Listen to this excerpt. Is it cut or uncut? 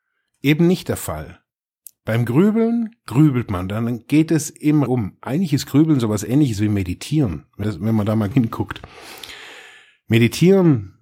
cut